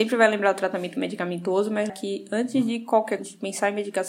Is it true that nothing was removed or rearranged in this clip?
no; 2 cuts; at 1.9 s, 3.2 s

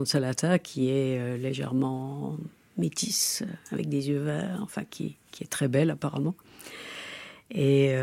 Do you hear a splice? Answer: no; 0 cuts

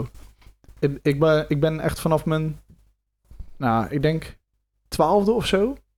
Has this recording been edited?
no; 0 cuts

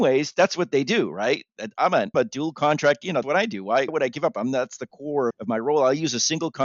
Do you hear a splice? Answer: yes; 4 cuts; at 2.1 s, 3.2 s, 3.9 s, 5.3 s

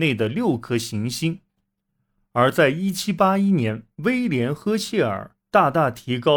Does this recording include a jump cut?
yes; 2 cuts; at 3.9 s, 5.4 s

